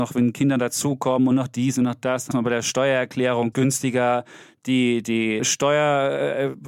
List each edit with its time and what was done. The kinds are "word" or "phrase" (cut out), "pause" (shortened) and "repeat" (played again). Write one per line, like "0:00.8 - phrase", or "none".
0:02.3 - word
0:03.5 - phrase
0:05.0 - word
0:05.4 - word